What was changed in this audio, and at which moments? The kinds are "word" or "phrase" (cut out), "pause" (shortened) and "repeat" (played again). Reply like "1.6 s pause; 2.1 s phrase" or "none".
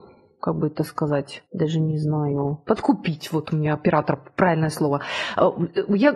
1.5 s pause

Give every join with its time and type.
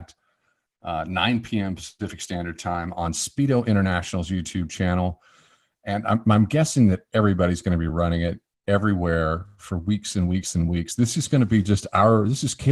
none

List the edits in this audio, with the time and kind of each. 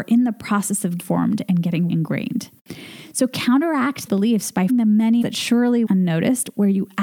1.0 s word; 1.9 s word; 4.1 s word; 4.7 s word; 5.2 s word; 5.9 s word

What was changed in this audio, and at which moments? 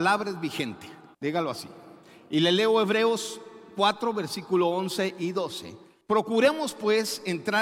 1.1 s pause; 6.0 s pause

